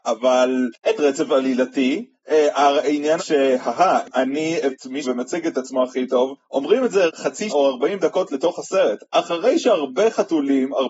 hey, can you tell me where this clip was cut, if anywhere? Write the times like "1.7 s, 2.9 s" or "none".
1.0 s, 3.2 s, 4.7 s, 5.0 s, 7.1 s, 7.5 s

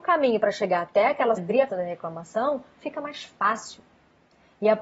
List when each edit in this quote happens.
1.4 s, 1.7 s

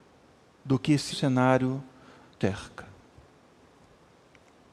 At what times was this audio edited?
1.1 s, 2.4 s

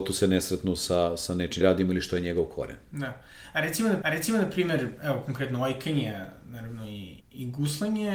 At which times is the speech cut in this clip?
1.6 s, 4.0 s, 7.2 s

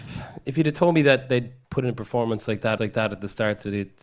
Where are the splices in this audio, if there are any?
1.6 s, 2.8 s

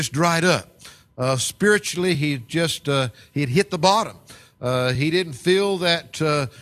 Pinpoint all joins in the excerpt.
none

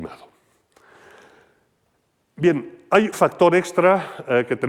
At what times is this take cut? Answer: 3.1 s

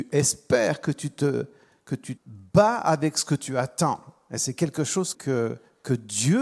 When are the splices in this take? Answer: 2.2 s, 5.1 s

